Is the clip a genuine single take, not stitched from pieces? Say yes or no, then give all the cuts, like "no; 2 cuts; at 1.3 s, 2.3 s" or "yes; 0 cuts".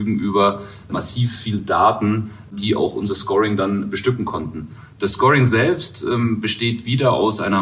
yes; 0 cuts